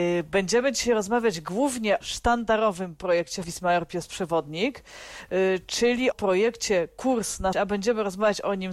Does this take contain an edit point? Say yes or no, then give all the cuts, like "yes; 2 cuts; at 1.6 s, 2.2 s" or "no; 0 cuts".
yes; 4 cuts; at 2.0 s, 3.4 s, 6.1 s, 7.5 s